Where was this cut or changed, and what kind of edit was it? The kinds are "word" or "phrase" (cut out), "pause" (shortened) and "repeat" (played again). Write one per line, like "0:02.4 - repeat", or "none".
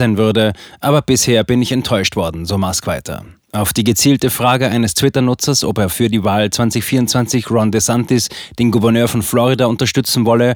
none

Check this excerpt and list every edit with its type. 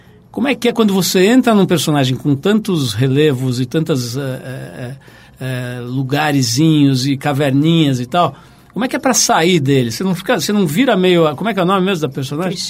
none

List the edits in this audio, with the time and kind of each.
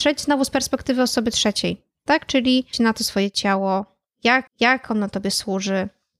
0:02.7 - word
0:04.5 - repeat

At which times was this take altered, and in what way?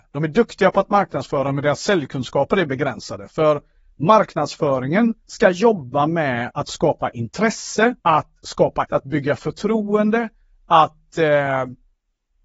0:08.0 - pause
0:08.9 - word

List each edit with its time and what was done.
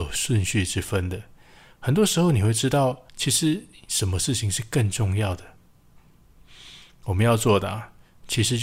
0:03.1 - pause

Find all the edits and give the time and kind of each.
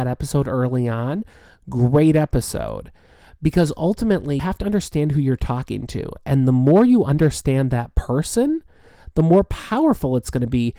0:04.4 - word

